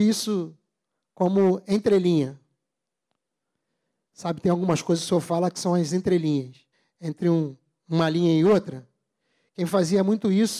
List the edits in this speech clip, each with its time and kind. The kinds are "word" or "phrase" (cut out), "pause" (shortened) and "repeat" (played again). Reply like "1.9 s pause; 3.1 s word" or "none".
6.7 s pause